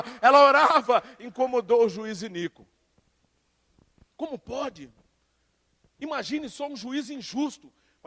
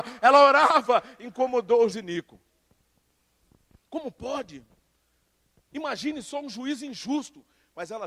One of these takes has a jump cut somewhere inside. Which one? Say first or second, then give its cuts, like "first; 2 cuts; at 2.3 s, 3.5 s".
second; 1 cut; at 1.9 s